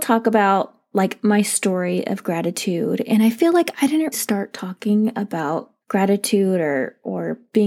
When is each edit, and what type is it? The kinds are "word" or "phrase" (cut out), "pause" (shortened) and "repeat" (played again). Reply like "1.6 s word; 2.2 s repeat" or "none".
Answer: 4.1 s word; 5.8 s pause